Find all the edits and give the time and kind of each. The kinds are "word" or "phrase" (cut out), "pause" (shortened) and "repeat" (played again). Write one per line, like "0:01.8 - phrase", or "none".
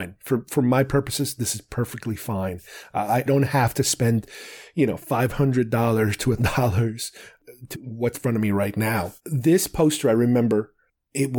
0:03.3 - word
0:06.4 - word
0:07.7 - phrase
0:08.1 - word
0:09.2 - pause

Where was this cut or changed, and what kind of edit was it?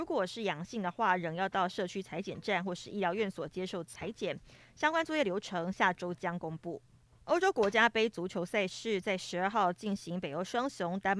none

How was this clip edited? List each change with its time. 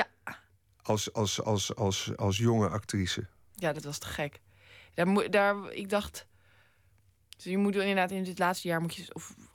none

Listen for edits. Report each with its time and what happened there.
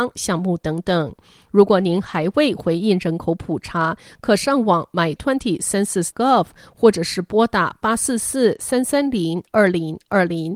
0:05.2 - word
0:06.1 - word

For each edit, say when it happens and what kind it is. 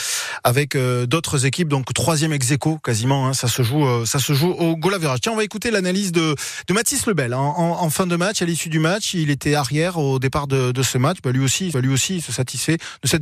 0:11.7 - repeat

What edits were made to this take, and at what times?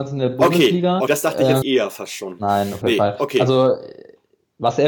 0:01.1 - word
0:01.6 - word
0:02.8 - word

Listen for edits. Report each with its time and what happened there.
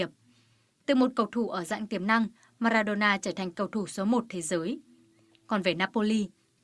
none

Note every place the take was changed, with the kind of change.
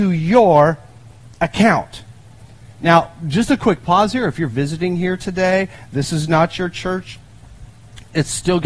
none

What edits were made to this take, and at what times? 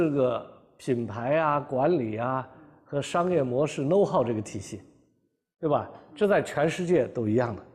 none

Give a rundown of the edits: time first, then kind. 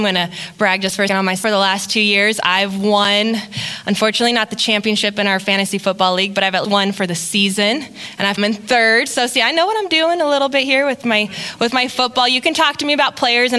0:01.1 - word
0:01.4 - word
0:06.6 - word
0:08.4 - word

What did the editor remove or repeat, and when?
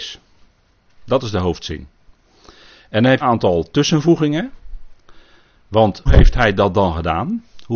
0:03.2 - phrase
0:06.1 - word

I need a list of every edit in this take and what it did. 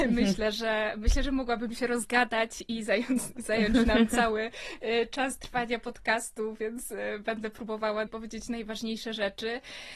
0:08.1 - phrase

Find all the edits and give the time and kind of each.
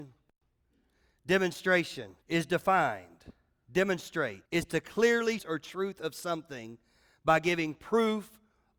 0:02.2 - pause
0:04.5 - pause
0:05.4 - phrase

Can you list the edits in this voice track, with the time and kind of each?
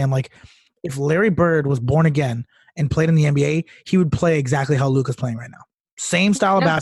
none

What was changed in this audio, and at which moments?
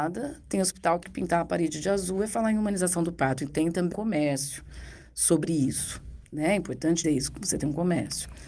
0:01.0 - word
0:03.5 - word
0:03.9 - word
0:07.0 - word

